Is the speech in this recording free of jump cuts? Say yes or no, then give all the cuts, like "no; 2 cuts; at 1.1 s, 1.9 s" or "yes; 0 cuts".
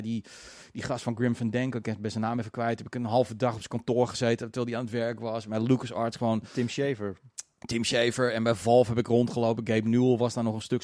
yes; 0 cuts